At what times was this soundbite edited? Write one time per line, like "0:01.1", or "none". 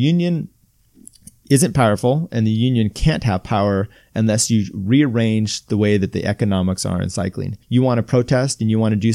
0:07.6